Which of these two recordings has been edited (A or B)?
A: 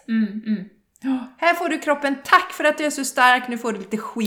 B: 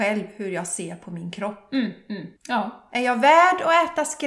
B